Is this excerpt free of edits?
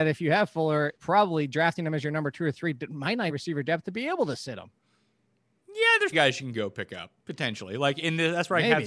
no; 4 cuts; at 1.0 s, 3.3 s, 6.1 s, 7.2 s

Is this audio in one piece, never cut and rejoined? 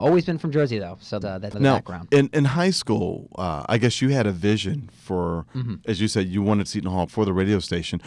no; 4 cuts; at 1.2 s, 1.5 s, 6.7 s, 7.1 s

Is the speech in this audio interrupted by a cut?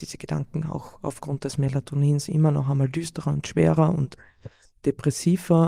no; 0 cuts

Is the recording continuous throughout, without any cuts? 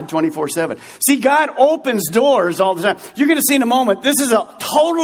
yes; 0 cuts

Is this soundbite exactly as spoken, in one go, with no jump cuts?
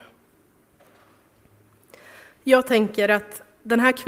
yes; 0 cuts

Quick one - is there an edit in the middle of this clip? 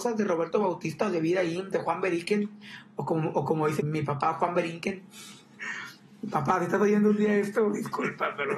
yes; 1 cut; at 3.8 s

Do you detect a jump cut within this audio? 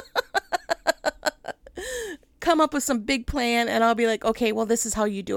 no; 0 cuts

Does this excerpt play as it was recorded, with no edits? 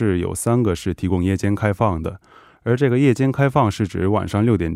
yes; 0 cuts

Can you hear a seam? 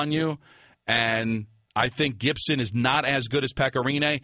yes; 1 cut; at 1.7 s

